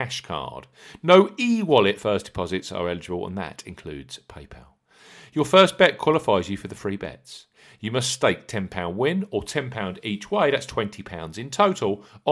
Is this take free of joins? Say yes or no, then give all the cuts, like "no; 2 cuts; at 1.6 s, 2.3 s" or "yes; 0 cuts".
yes; 0 cuts